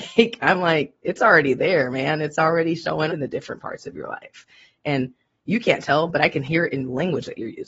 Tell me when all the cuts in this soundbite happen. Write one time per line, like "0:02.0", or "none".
0:03.1